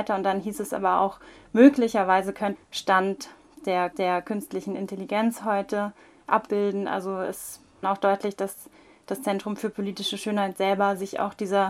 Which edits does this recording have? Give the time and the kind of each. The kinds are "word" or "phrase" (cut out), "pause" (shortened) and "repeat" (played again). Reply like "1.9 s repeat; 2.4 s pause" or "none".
2.5 s phrase; 3.9 s repeat; 7.8 s phrase